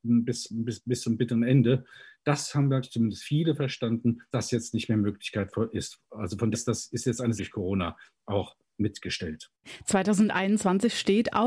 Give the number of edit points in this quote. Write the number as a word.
four